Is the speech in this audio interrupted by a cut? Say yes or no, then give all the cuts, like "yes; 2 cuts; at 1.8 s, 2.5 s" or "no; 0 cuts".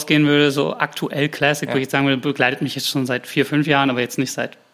no; 0 cuts